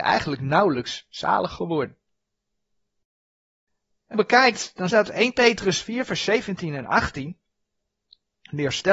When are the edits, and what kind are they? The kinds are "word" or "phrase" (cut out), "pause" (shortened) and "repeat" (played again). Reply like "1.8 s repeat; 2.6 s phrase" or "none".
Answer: 4.1 s phrase; 4.9 s phrase